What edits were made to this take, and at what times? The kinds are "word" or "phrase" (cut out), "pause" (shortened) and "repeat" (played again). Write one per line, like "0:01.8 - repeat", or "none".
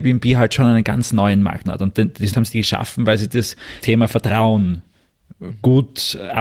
0:01.6 - word
0:02.3 - word
0:03.8 - word